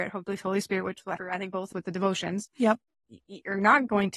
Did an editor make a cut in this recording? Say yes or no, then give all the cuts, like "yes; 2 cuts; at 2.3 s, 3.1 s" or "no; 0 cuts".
yes; 2 cuts; at 1.2 s, 1.7 s